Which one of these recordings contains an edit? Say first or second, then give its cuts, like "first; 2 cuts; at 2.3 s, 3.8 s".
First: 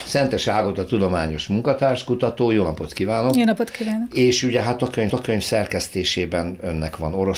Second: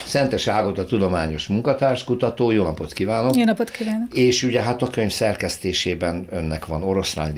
first; 1 cut; at 5.1 s